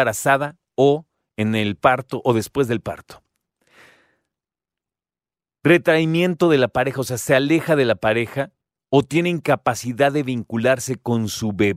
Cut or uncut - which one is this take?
uncut